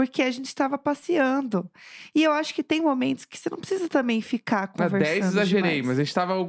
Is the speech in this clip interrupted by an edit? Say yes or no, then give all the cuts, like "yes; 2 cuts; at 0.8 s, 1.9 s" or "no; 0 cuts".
no; 0 cuts